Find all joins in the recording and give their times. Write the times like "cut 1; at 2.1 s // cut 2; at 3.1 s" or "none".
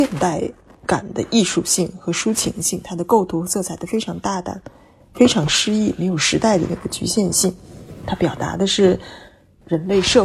none